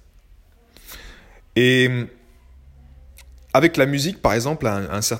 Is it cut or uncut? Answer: uncut